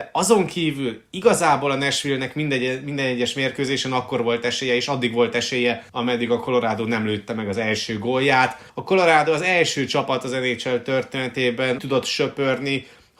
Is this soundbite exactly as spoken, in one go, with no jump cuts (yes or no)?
no